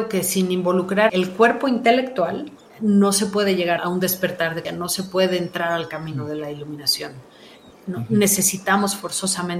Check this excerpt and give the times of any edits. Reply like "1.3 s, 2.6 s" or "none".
1.1 s, 2.6 s, 3.8 s, 4.6 s